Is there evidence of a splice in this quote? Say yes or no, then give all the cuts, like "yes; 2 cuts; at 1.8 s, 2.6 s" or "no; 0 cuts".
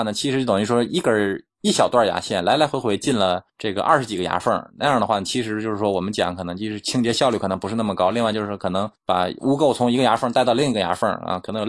yes; 2 cuts; at 3.5 s, 9.0 s